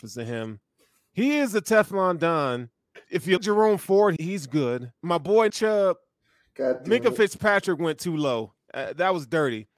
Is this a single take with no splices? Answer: no; 5 cuts; at 3.0 s, 3.4 s, 4.2 s, 5.0 s, 5.5 s

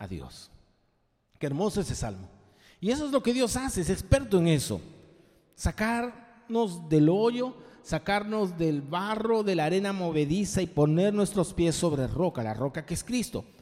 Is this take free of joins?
yes; 0 cuts

